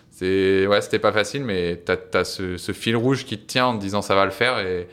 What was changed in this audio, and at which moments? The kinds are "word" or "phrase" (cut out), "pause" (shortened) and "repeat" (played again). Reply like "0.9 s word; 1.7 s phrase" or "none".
none